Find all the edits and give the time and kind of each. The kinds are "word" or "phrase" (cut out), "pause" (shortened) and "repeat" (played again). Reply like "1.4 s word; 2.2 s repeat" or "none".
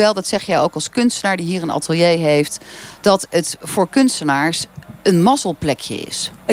none